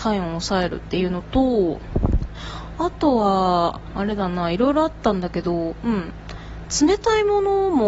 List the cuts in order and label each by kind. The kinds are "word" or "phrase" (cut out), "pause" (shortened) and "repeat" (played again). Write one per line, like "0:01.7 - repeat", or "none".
none